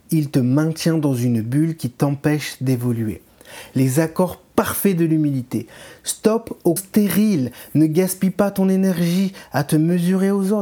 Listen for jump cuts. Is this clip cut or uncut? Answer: cut